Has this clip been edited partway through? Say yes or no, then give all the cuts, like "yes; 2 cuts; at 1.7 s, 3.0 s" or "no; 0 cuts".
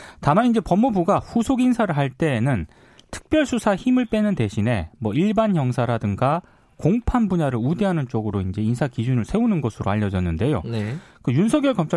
no; 0 cuts